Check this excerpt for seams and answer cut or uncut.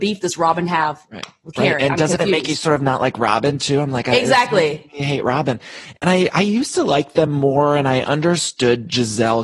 uncut